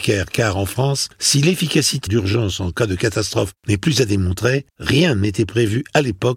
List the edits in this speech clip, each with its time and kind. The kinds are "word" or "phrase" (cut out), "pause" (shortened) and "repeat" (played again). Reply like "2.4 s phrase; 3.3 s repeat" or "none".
1.1 s pause; 2.1 s phrase; 3.6 s pause; 4.7 s pause